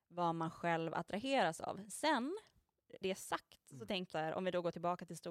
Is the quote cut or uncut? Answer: cut